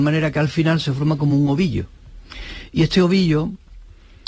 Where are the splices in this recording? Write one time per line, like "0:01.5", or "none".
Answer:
none